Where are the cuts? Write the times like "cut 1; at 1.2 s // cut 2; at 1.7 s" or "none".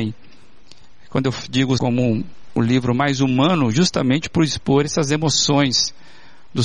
cut 1; at 1.8 s

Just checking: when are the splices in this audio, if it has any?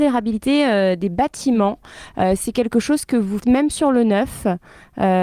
cut 1; at 3.4 s

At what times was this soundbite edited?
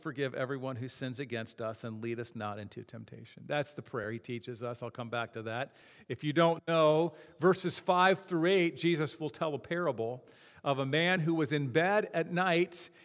none

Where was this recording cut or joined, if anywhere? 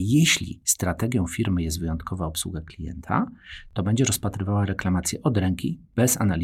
none

